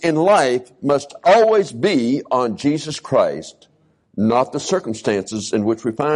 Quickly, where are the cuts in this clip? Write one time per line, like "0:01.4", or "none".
none